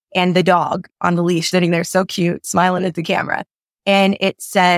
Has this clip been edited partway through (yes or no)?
yes